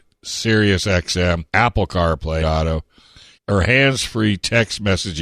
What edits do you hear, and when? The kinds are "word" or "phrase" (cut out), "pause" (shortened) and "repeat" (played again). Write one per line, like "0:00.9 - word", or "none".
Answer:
0:01.5 - pause
0:02.4 - word
0:03.3 - word

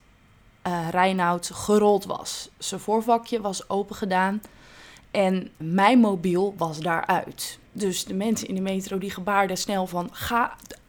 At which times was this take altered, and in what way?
0:05.6 - word
0:07.7 - pause

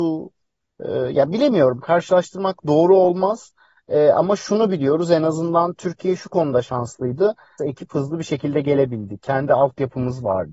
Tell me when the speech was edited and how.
0:07.6 - phrase

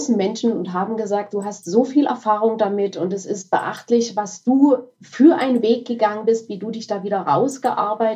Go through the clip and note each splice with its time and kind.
none

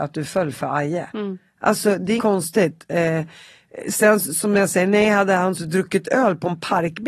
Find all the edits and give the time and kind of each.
0:02.2 - word
0:05.5 - word

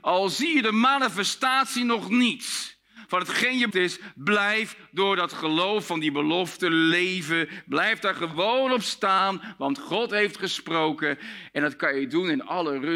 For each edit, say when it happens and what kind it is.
0:03.7 - word

